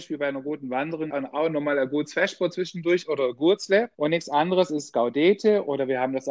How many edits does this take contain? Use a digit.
2